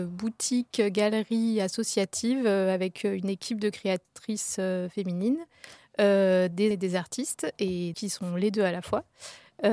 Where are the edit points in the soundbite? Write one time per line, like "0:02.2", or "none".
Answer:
0:06.7
0:07.9